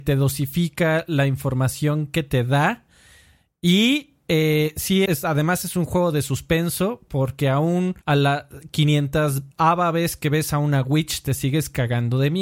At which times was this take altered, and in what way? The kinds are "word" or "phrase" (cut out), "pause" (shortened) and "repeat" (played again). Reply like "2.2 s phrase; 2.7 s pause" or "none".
5.1 s word; 8.0 s pause; 9.5 s pause